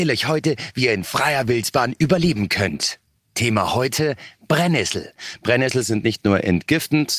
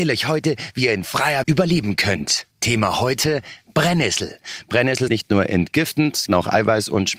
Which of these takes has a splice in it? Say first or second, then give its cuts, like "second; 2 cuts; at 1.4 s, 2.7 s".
second; 4 cuts; at 1.4 s, 2.5 s, 5.1 s, 6.3 s